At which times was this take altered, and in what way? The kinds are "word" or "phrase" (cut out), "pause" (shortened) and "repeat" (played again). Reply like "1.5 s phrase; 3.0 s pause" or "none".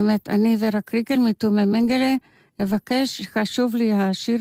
none